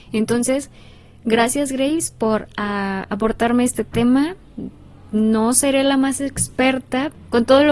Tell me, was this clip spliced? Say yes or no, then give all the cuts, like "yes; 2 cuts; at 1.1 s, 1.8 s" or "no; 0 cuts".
no; 0 cuts